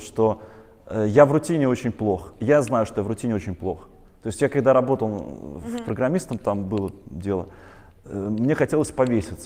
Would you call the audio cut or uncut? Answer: uncut